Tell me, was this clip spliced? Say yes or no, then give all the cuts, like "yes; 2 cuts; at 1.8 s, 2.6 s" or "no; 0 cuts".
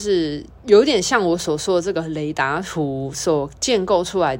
no; 0 cuts